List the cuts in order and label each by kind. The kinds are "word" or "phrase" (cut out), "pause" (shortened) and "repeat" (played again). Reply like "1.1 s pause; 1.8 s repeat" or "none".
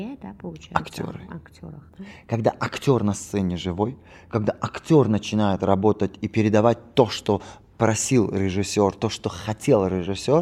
none